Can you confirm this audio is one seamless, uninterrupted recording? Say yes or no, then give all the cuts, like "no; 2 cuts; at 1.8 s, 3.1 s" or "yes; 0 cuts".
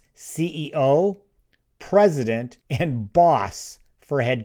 no; 1 cut; at 2.6 s